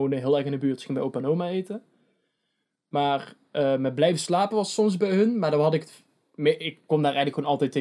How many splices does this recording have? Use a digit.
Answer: 0